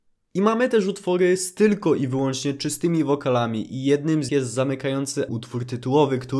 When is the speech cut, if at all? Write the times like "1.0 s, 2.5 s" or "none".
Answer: 4.3 s, 5.3 s